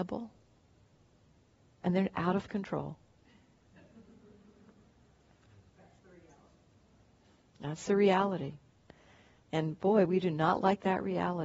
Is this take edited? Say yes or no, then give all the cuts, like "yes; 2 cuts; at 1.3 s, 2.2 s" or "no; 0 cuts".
no; 0 cuts